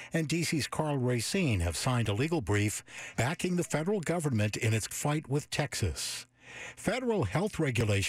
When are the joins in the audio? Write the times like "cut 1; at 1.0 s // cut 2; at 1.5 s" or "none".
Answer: cut 1; at 4.9 s